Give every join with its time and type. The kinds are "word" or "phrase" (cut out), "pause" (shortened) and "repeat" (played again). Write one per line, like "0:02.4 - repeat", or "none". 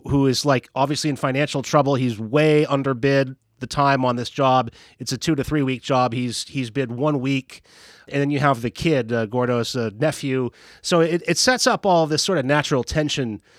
none